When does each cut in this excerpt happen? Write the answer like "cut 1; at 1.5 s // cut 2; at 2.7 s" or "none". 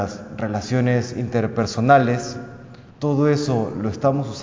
cut 1; at 2.9 s

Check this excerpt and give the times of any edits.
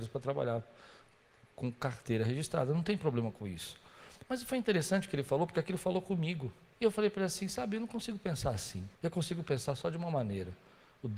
cut 1; at 6.7 s // cut 2; at 8.9 s

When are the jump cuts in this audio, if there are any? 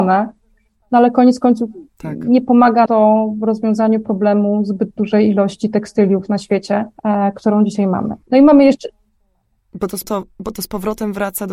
cut 1; at 2.9 s // cut 2; at 7.0 s // cut 3; at 8.2 s // cut 4; at 10.0 s

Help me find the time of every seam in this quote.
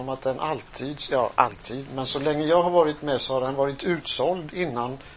none

